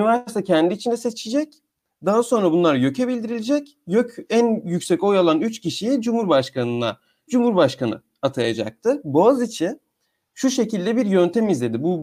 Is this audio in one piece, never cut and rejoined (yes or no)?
no